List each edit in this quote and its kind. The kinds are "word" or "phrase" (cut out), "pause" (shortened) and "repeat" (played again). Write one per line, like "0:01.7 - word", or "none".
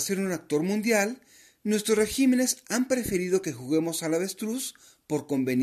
none